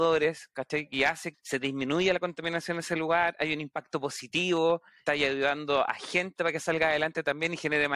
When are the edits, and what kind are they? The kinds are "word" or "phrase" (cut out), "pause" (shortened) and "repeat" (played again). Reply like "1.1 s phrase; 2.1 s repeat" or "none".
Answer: 1.3 s word; 5.1 s word